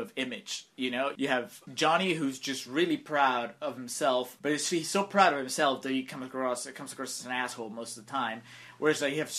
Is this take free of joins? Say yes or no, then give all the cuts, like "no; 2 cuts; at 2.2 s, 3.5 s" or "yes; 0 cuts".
yes; 0 cuts